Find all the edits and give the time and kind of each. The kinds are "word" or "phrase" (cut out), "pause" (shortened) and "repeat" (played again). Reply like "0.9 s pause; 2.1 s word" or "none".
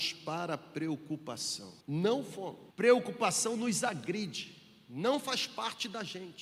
1.8 s pause; 2.7 s pause

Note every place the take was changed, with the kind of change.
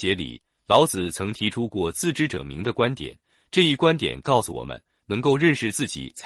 none

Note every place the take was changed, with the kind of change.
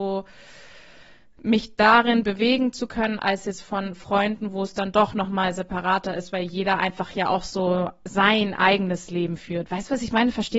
none

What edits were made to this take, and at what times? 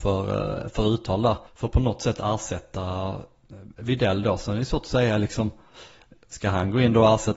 1.5 s pause

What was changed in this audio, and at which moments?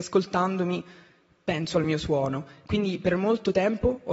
none

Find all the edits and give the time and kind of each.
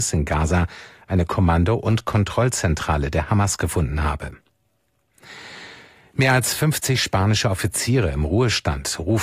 none

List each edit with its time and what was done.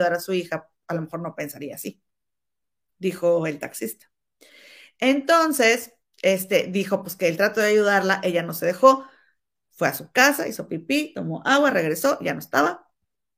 none

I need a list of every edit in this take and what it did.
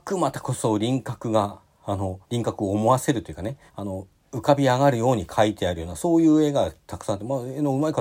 2.2 s pause; 3.7 s pause

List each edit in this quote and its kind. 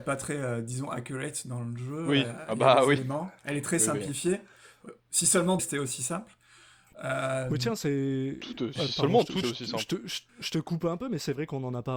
3.4 s pause; 5.0 s pause; 5.6 s word; 9.4 s word; 10.3 s pause

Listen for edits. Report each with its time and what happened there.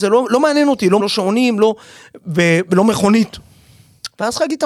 1.0 s word

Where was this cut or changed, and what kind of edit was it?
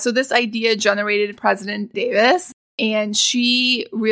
1.4 s word; 1.9 s word

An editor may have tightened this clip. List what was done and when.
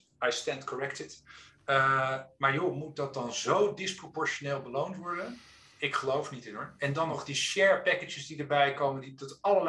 none

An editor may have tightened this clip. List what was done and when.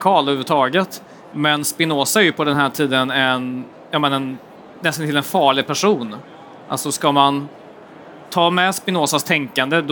none

